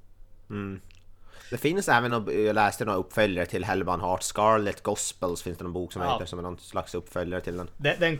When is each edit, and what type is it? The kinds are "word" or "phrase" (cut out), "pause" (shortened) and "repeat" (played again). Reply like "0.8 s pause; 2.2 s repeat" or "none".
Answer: none